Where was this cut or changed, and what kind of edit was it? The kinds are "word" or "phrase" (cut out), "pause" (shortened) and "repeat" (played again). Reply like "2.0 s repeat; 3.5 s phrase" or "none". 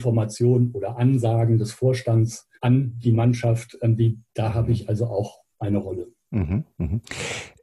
2.6 s pause; 4.3 s pause; 5.5 s pause

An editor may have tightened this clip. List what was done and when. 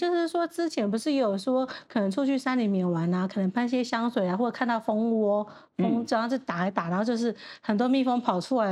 none

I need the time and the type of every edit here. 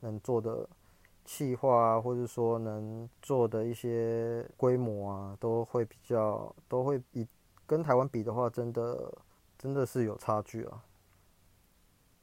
3.1 s pause; 4.5 s pause; 7.1 s pause; 9.4 s pause

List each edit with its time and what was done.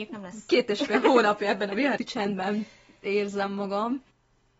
2.0 s word

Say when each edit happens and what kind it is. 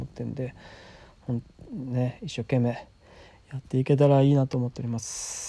none

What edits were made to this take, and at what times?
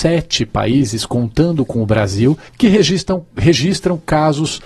2.5 s pause

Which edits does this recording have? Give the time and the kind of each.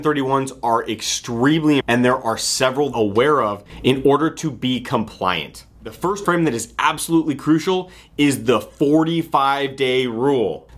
1.8 s word; 2.9 s phrase; 6.2 s word

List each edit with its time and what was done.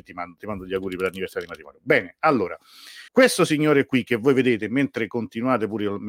3.1 s pause

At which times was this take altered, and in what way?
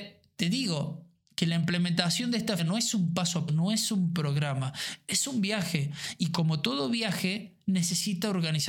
2.6 s word; 3.5 s word

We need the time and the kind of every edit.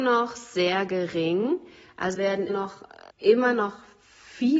2.1 s word; 2.5 s word; 3.1 s word

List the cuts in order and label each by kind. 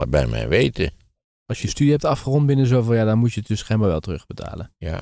1.6 s phrase

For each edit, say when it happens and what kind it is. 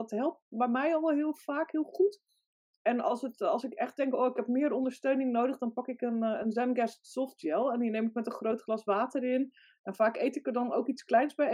none

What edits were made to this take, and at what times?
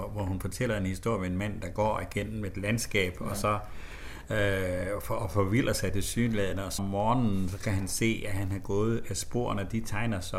6.8 s word

